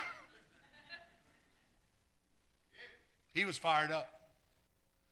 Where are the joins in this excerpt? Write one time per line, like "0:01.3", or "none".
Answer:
none